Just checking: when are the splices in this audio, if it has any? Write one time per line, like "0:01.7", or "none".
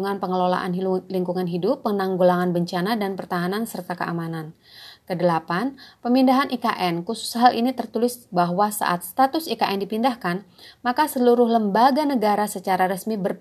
none

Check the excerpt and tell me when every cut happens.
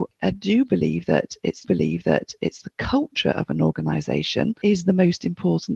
0:01.6
0:04.6

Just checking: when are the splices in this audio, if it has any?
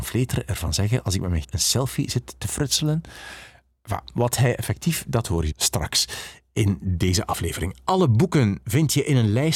0:01.4
0:05.0
0:05.5

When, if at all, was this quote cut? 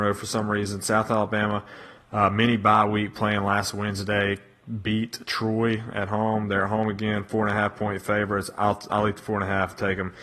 none

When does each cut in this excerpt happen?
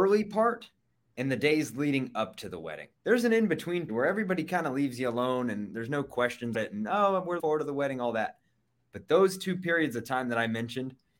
0:03.0
0:03.9
0:06.5
0:07.4

